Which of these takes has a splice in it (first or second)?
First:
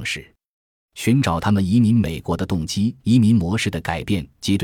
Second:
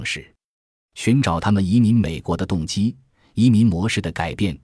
first